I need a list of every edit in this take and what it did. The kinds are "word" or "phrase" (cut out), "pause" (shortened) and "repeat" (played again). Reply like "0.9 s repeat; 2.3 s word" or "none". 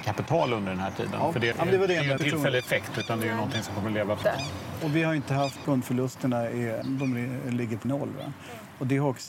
1.5 s word; 2.2 s word; 4.2 s word; 5.6 s word; 6.8 s word; 7.8 s word